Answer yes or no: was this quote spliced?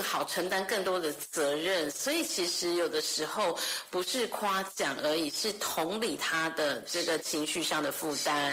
no